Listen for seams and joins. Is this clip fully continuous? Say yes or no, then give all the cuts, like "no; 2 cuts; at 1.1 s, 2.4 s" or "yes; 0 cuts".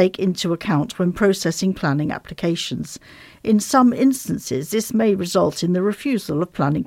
yes; 0 cuts